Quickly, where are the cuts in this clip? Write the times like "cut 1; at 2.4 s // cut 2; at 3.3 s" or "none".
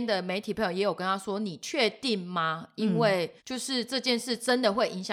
cut 1; at 3.4 s